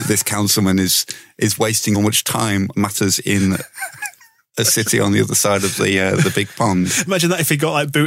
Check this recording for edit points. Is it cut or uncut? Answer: cut